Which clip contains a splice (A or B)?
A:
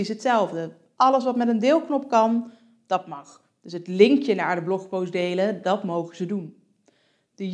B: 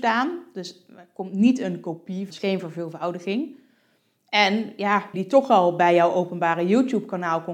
B